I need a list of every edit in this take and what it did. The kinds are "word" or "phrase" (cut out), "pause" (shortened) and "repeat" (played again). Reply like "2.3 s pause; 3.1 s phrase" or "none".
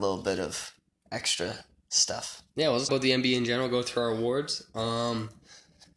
2.9 s word